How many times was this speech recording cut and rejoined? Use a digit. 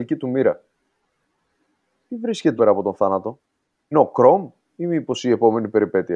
2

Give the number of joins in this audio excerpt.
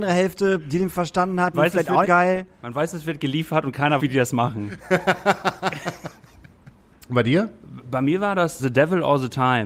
4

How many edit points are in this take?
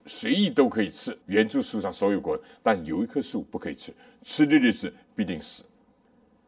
1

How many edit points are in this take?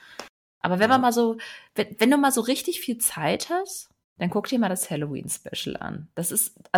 1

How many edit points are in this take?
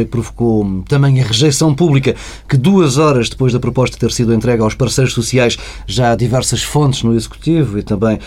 0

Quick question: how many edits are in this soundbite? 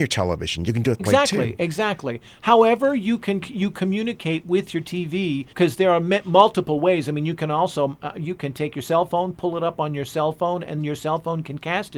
3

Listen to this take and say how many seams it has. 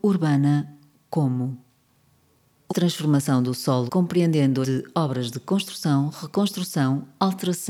3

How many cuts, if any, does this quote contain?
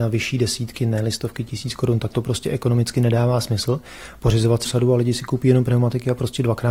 1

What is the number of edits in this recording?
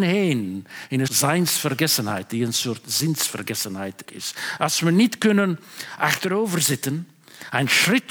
2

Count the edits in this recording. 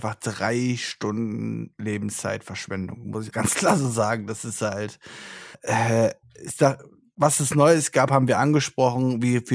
2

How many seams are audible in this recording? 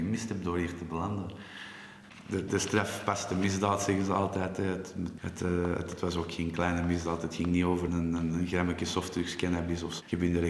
2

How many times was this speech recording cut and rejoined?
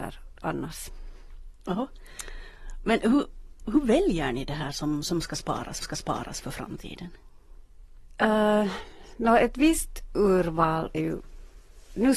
2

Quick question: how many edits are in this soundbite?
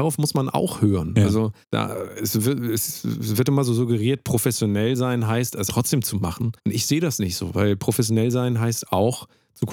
3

